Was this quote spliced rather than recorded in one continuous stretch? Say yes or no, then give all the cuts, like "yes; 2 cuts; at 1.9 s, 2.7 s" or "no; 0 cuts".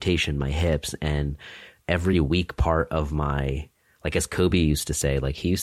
no; 0 cuts